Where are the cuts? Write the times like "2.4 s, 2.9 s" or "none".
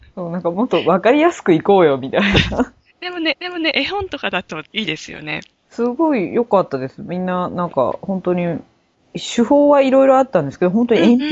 3.3 s, 4.6 s, 8.9 s